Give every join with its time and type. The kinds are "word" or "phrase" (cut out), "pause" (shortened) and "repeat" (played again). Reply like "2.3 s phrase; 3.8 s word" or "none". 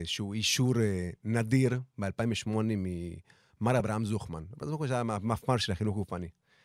none